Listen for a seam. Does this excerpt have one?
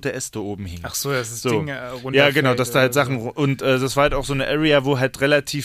no; 0 cuts

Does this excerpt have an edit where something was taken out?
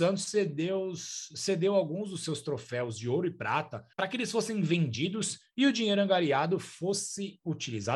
yes; 1 cut; at 3.9 s

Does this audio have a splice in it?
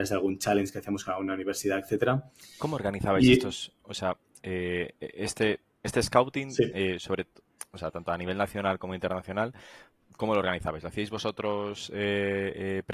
no; 0 cuts

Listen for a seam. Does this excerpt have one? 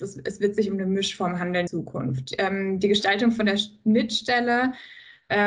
yes; 1 cut; at 1.7 s

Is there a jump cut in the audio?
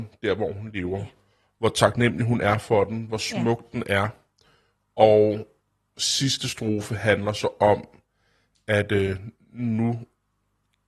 no; 0 cuts

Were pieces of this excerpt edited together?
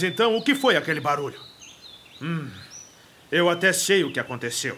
no; 0 cuts

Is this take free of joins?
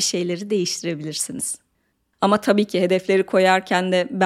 yes; 0 cuts

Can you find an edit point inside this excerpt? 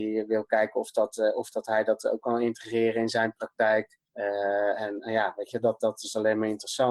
yes; 1 cut; at 4.1 s

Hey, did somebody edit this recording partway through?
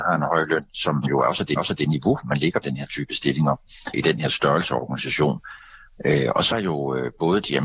yes; 5 cuts; at 1.0 s, 1.6 s, 2.6 s, 3.9 s, 6.5 s

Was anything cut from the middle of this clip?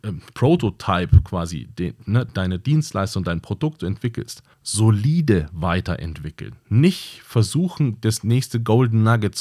yes; 3 cuts; at 2.3 s, 3.8 s, 4.5 s

